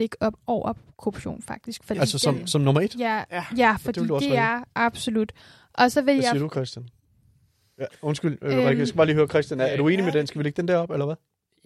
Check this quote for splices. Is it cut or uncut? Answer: uncut